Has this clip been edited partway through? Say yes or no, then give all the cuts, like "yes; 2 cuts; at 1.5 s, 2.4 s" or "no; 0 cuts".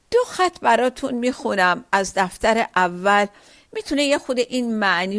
no; 0 cuts